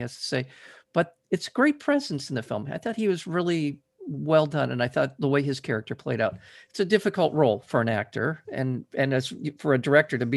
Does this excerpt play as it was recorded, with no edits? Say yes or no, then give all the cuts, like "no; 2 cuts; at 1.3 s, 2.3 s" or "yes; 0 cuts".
yes; 0 cuts